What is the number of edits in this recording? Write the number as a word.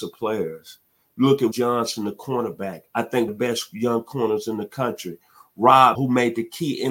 three